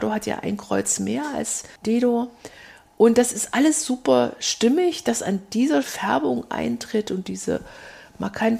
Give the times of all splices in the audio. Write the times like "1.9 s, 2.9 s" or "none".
1.8 s, 5.8 s